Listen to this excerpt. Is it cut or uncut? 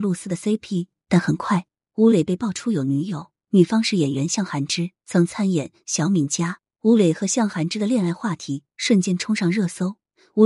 cut